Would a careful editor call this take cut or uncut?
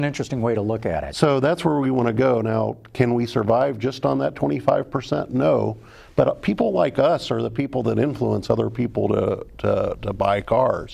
uncut